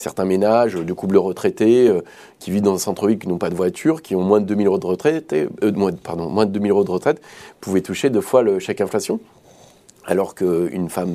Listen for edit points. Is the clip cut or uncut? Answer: uncut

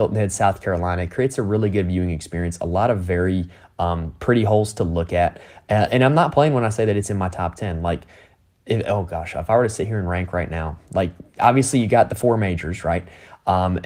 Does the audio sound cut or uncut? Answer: uncut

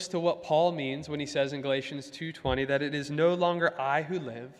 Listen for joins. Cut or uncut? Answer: uncut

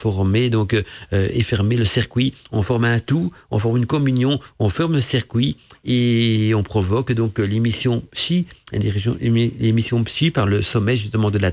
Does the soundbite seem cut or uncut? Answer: uncut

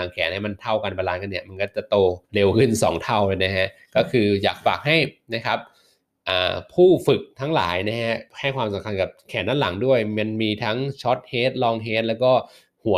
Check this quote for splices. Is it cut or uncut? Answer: cut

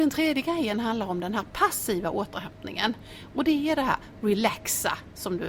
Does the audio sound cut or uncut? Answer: uncut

